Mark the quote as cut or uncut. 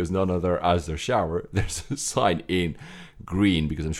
uncut